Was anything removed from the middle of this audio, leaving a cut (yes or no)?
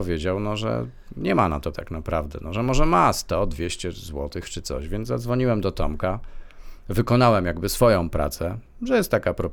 yes